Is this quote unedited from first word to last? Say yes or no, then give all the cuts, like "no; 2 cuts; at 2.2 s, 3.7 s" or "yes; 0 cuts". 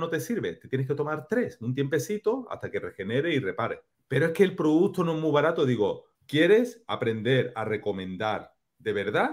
no; 2 cuts; at 3.9 s, 6.1 s